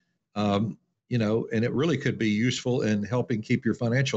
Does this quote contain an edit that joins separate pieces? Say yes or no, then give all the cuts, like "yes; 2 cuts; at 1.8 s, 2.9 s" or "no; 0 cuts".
no; 0 cuts